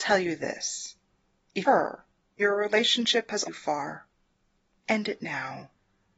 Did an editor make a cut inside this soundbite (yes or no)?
yes